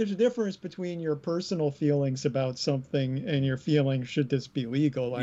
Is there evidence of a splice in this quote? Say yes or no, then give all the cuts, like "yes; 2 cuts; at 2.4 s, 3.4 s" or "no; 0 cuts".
no; 0 cuts